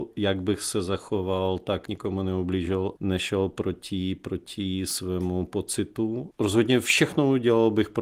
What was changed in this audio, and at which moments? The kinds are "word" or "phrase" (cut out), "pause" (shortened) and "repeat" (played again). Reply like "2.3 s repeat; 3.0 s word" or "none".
1.9 s word; 3.0 s phrase